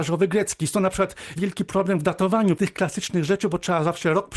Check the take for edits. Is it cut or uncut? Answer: cut